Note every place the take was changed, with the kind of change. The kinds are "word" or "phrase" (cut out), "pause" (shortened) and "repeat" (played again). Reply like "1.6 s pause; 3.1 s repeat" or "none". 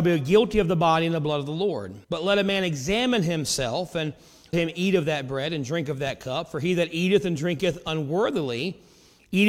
2.0 s pause; 4.5 s word